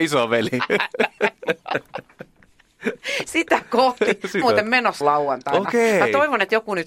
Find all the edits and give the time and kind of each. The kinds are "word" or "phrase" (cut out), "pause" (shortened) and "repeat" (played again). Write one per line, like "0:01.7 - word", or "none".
0:04.4 - word
0:05.0 - word